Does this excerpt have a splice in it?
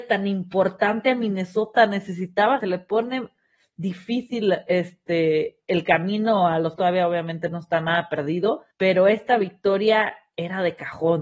yes; 3 cuts; at 2.6 s, 6.8 s, 8.7 s

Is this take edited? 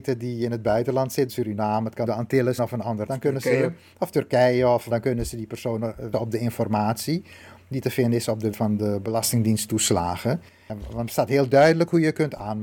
yes; 8 cuts; at 1.3 s, 2.1 s, 2.6 s, 3.1 s, 4.9 s, 6.1 s, 8.5 s, 11.1 s

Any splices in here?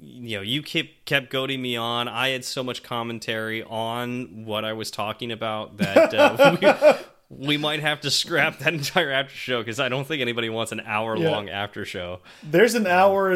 no; 0 cuts

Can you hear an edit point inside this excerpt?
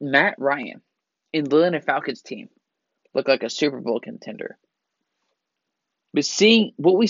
no; 0 cuts

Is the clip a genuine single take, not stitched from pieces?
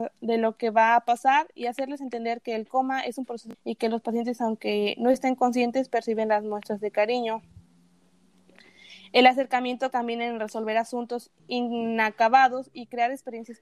no; 3 cuts; at 3.5 s, 9.9 s, 11.4 s

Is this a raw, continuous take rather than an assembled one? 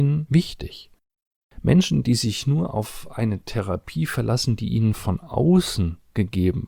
yes; 0 cuts

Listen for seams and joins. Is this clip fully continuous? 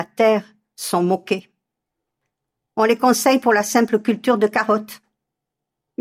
yes; 0 cuts

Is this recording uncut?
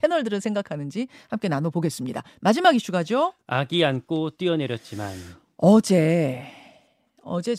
yes; 0 cuts

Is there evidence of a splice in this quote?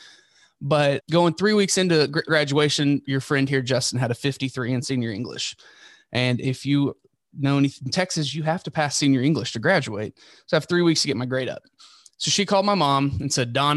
yes; 3 cuts; at 1.0 s, 2.3 s, 3.0 s

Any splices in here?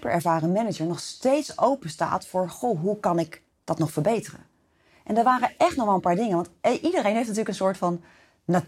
no; 0 cuts

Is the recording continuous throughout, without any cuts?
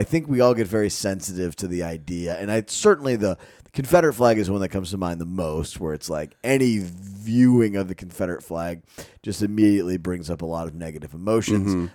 yes; 0 cuts

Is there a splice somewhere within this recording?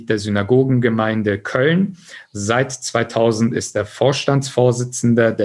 no; 0 cuts

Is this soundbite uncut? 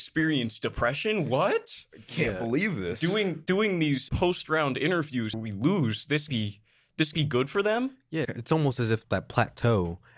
no; 6 cuts; at 4.1 s, 5.3 s, 6.3 s, 7.1 s, 8.2 s, 9.0 s

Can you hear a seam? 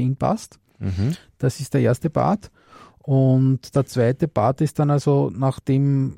no; 0 cuts

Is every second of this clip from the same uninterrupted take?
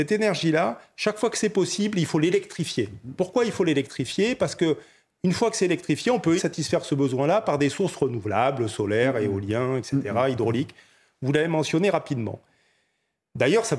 no; 1 cut; at 6.4 s

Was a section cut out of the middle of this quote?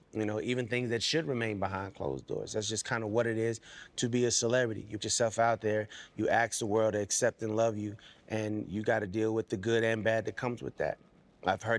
yes; 1 cut; at 5.0 s

